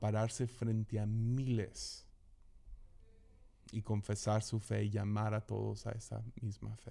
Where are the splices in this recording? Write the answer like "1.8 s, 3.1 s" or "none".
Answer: none